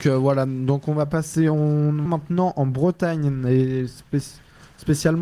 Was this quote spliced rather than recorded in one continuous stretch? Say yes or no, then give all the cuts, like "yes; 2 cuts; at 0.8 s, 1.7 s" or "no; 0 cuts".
yes; 1 cut; at 2.1 s